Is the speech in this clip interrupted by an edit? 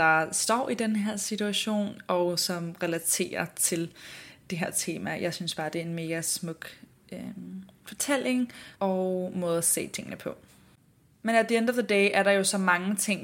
yes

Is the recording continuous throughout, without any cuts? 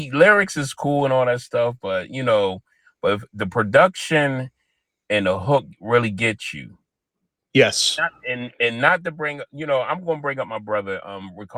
yes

